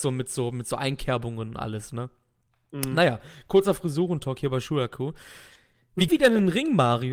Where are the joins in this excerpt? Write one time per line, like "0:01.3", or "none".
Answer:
0:06.1